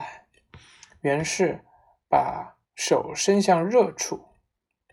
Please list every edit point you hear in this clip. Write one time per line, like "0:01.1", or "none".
0:02.7